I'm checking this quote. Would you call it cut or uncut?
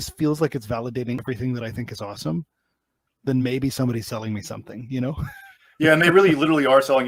uncut